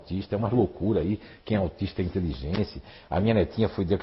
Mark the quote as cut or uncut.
uncut